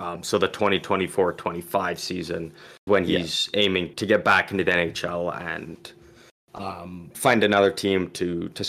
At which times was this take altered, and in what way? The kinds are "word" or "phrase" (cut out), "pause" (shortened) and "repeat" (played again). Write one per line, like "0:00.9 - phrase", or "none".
0:02.9 - word
0:03.9 - word
0:07.1 - word

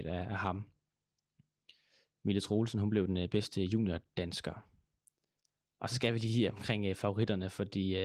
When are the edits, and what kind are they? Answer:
none

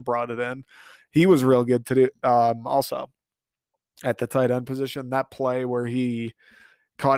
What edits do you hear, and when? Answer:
none

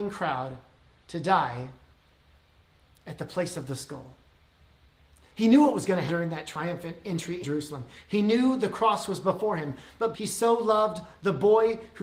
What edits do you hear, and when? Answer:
0:06.1 - word
0:07.4 - word
0:10.1 - word

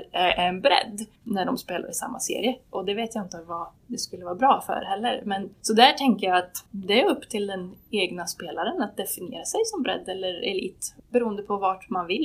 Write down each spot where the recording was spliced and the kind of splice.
0:01.2 - pause
0:03.8 - pause
0:05.5 - pause
0:06.7 - pause
0:11.0 - pause

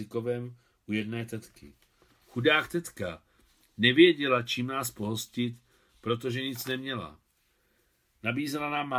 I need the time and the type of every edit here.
none

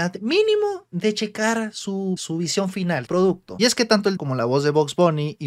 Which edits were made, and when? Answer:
0:02.2 - word
0:03.1 - word
0:04.2 - word

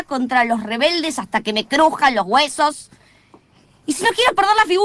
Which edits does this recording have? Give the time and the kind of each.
none

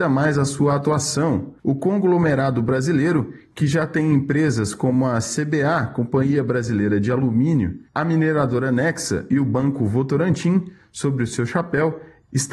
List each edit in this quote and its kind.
0:01.6 - pause

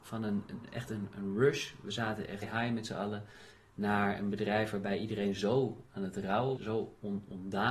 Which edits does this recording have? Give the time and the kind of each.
0:02.4 - word
0:06.6 - word

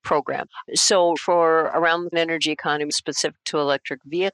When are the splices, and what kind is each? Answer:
0:01.2 - word
0:02.1 - word
0:02.9 - word

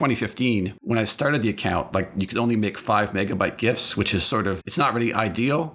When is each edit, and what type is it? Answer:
0:04.6 - word

